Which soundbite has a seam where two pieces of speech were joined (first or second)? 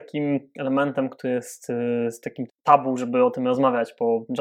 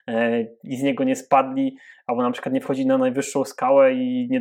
first